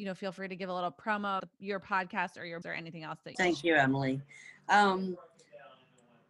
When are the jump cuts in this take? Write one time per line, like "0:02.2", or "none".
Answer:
0:01.4
0:02.6
0:03.3